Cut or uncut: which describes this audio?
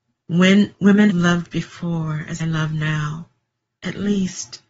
cut